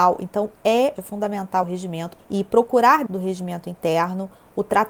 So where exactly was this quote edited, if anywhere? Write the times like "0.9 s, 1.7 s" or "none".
1.0 s, 1.6 s, 2.2 s, 3.1 s